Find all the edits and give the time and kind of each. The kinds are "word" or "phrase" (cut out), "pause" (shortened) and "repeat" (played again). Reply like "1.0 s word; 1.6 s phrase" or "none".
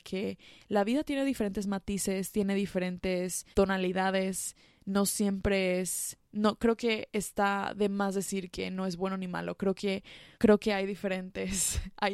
3.5 s pause; 6.2 s pause; 10.3 s pause